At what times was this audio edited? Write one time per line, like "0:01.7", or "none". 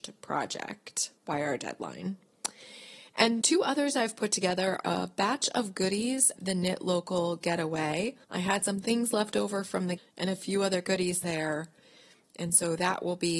0:01.2
0:03.4
0:04.8
0:06.4
0:08.2
0:10.0
0:11.2